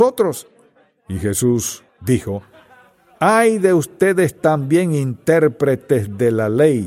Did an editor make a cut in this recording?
yes; 1 cut; at 1.9 s

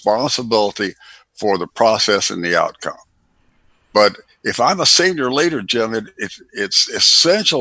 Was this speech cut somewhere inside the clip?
no; 0 cuts

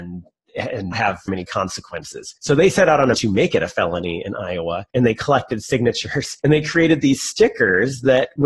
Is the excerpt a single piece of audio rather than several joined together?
no; 6 cuts; at 0.9 s, 1.3 s, 2.4 s, 3.1 s, 4.9 s, 6.4 s

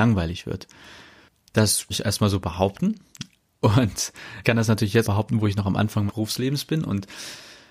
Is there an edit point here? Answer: yes; 4 cuts; at 1.9 s, 4.4 s, 5.0 s, 6.1 s

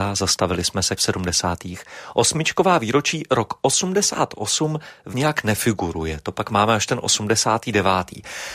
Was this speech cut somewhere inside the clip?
yes; 2 cuts; at 1.0 s, 5.1 s

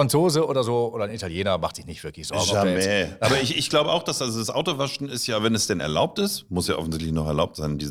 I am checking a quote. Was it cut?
no; 0 cuts

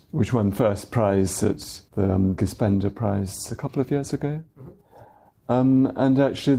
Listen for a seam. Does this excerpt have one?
yes; 2 cuts; at 1.9 s, 2.4 s

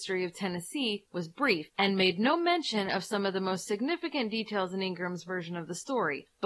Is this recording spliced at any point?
no; 0 cuts

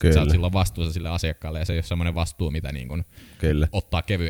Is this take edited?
no; 0 cuts

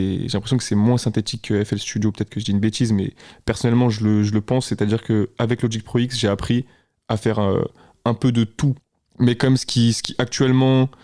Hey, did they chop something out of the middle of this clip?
no; 0 cuts

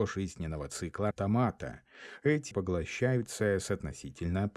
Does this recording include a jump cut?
yes; 2 cuts; at 1.1 s, 2.5 s

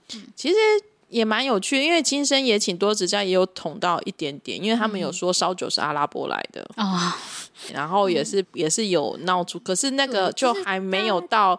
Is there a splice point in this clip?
yes; 2 cuts; at 7.7 s, 8.4 s

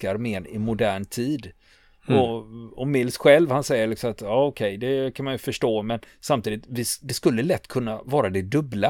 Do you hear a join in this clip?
no; 0 cuts

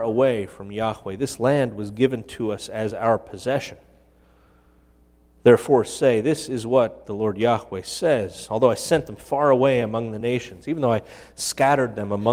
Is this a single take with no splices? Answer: yes; 0 cuts

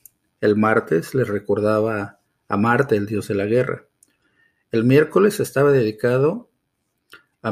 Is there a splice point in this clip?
no; 0 cuts

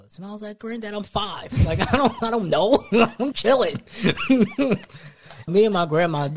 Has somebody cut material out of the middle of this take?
yes; 2 cuts; at 3.3 s, 5.5 s

